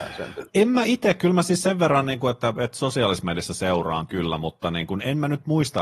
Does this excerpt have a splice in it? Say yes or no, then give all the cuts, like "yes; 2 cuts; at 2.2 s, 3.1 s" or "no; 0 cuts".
no; 0 cuts